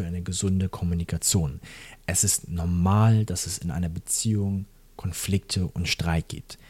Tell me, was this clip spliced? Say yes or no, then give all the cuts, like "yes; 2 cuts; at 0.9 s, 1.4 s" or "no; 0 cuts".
no; 0 cuts